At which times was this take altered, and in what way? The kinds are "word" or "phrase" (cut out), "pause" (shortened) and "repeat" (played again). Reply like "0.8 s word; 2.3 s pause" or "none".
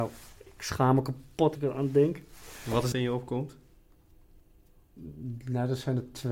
1.5 s word; 2.9 s phrase